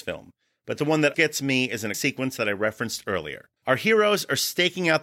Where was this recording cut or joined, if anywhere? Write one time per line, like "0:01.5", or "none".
0:01.1
0:01.9
0:03.6